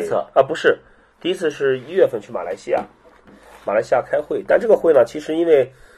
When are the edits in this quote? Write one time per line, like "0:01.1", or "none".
none